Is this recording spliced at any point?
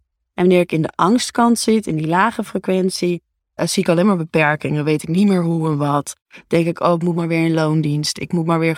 yes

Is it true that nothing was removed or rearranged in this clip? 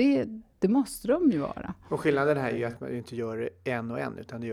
yes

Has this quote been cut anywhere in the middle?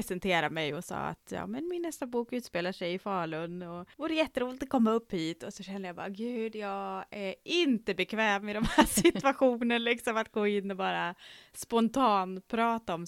yes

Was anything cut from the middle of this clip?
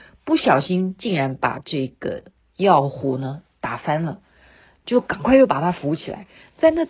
no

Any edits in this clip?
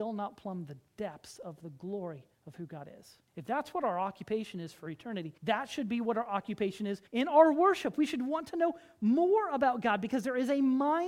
yes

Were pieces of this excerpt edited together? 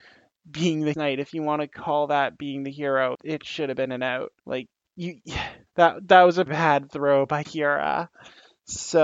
yes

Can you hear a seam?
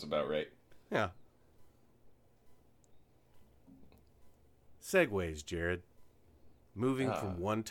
no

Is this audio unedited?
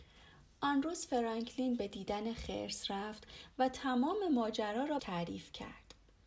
no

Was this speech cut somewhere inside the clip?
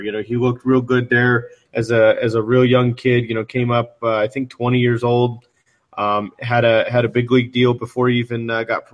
no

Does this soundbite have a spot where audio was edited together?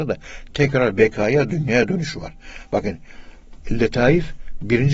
no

